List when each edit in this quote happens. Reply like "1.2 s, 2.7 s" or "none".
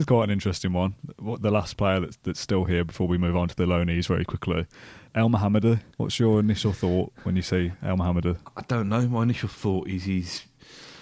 5.1 s, 5.9 s